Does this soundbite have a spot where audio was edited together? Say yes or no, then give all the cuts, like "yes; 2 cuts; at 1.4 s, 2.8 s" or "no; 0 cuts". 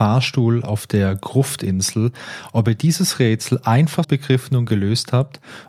yes; 1 cut; at 4.0 s